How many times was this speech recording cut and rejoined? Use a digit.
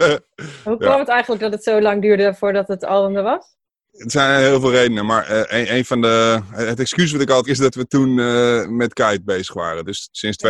1